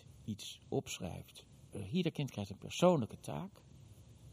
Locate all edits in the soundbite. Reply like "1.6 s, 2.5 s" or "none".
none